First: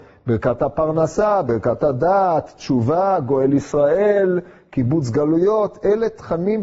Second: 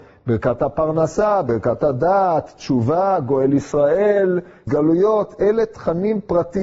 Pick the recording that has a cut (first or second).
second